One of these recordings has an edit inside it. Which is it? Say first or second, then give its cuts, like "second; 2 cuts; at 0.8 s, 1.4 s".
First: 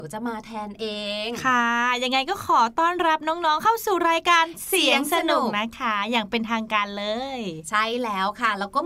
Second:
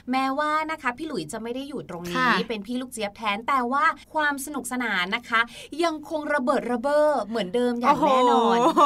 second; 1 cut; at 4.0 s